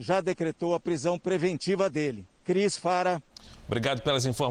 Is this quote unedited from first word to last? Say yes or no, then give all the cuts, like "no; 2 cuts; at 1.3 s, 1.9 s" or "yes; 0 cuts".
no; 1 cut; at 2.4 s